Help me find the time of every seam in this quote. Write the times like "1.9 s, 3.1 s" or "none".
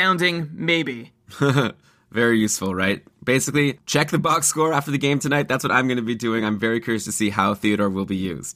none